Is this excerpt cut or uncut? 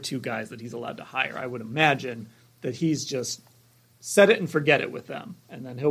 uncut